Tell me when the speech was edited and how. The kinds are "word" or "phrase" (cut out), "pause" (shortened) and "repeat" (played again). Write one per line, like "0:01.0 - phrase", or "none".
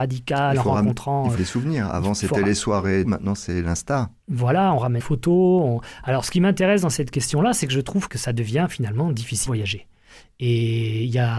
0:01.4 - word
0:03.0 - word
0:05.0 - word
0:08.1 - word
0:09.5 - word